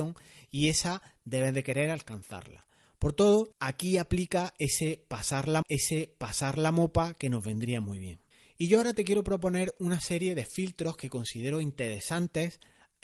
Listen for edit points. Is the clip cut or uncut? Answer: cut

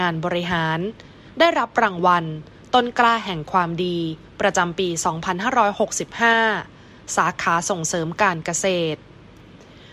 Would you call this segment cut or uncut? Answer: uncut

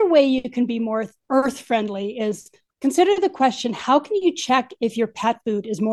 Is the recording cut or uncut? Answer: uncut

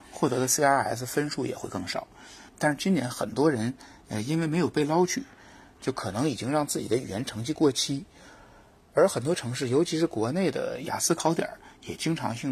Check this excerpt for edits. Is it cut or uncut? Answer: uncut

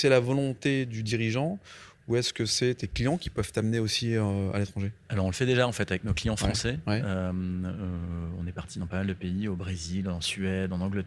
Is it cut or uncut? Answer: uncut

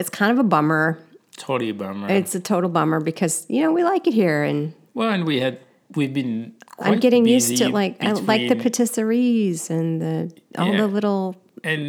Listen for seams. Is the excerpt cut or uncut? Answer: uncut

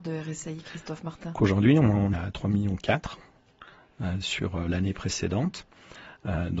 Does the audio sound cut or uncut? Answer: cut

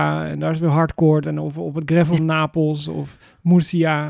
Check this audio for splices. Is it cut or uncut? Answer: cut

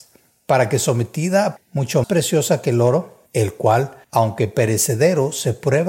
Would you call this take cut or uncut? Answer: cut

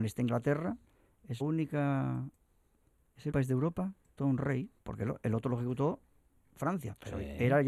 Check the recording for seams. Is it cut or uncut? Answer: cut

